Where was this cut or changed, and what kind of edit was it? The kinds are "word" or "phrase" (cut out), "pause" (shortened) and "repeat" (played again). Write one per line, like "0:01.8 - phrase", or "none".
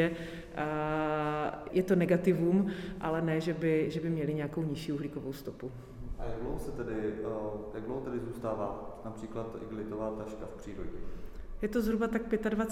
0:01.7 - word